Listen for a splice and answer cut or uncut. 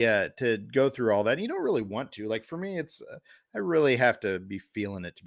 uncut